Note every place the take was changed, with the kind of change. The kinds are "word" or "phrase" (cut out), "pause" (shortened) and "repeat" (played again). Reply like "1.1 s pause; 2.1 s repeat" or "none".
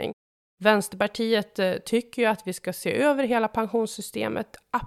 none